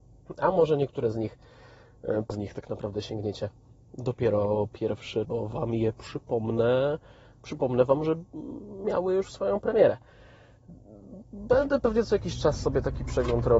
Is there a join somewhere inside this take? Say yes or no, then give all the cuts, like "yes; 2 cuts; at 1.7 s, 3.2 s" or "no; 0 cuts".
yes; 2 cuts; at 2.3 s, 5.2 s